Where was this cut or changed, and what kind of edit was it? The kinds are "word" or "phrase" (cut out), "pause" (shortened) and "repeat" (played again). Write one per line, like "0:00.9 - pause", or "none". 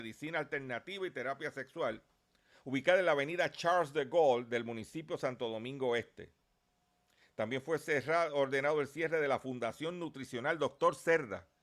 none

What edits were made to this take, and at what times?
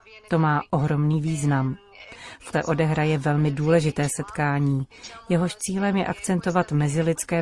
0:02.5 - word

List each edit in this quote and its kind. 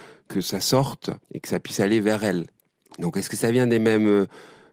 0:01.2 - pause
0:02.6 - pause

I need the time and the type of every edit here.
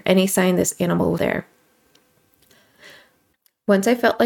0:01.2 - word

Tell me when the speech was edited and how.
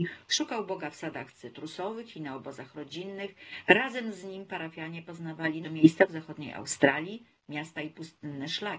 0:05.6 - word

